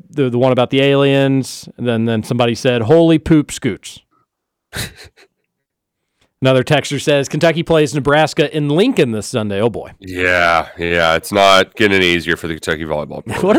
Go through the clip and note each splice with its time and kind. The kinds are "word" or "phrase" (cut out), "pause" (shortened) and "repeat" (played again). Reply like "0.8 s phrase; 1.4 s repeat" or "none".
none